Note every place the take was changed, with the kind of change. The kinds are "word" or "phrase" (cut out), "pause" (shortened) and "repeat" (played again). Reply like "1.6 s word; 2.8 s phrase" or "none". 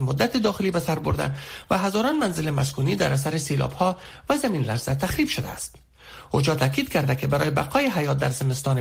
none